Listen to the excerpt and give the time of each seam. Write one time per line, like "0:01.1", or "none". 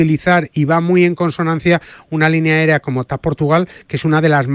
none